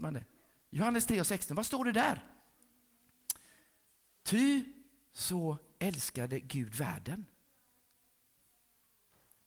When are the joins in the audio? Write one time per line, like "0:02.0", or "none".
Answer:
none